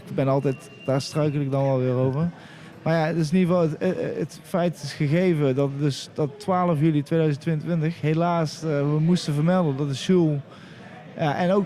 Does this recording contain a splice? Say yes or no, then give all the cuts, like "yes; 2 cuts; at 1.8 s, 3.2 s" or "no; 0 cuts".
no; 0 cuts